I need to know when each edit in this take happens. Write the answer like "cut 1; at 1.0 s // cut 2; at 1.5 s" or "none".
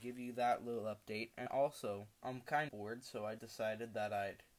cut 1; at 1.5 s // cut 2; at 2.1 s // cut 3; at 2.7 s // cut 4; at 3.4 s